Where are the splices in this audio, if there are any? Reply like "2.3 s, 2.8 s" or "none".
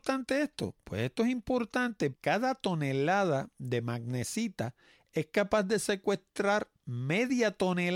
2.1 s

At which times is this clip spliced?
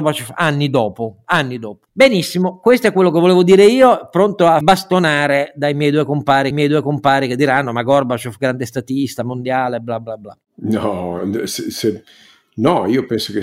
4.6 s, 6.5 s, 11.2 s

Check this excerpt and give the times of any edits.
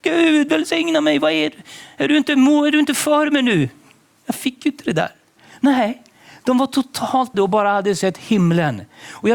7.3 s

